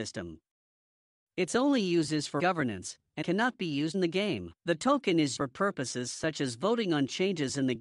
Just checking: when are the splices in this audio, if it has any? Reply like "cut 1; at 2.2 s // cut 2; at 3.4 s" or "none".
cut 1; at 2.4 s // cut 2; at 3.2 s // cut 3; at 3.9 s // cut 4; at 4.6 s // cut 5; at 5.4 s